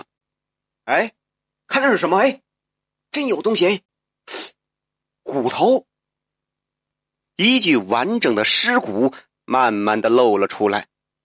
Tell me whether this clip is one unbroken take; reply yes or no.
yes